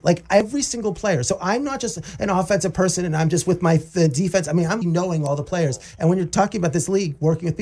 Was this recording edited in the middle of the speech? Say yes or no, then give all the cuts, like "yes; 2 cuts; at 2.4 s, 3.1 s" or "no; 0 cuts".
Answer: yes; 1 cut; at 4.8 s